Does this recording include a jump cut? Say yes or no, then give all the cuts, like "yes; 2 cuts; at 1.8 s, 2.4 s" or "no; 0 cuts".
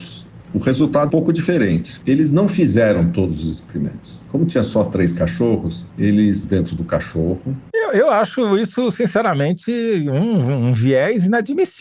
yes; 2 cuts; at 1.1 s, 6.4 s